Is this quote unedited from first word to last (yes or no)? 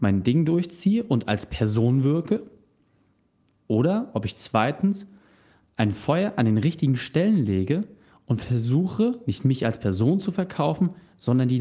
yes